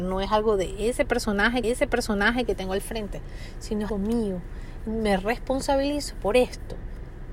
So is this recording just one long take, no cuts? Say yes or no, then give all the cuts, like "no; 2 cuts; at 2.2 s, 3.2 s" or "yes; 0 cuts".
no; 2 cuts; at 1.6 s, 3.9 s